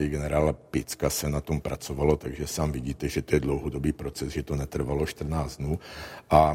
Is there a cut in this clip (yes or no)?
no